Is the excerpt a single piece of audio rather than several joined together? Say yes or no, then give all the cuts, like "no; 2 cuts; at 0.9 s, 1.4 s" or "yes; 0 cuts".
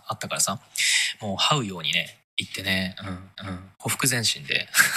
no; 1 cut; at 3.4 s